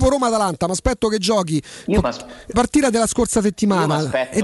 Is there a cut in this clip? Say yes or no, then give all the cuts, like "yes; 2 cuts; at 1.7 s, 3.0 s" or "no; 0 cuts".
yes; 1 cut; at 2.5 s